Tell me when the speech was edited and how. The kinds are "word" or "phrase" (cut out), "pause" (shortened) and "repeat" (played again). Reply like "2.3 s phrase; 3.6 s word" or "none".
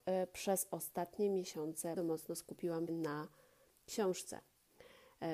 2.0 s word; 2.9 s word